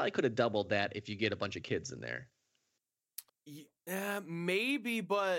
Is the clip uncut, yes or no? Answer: no